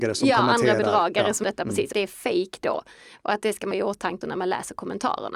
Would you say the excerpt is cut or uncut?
cut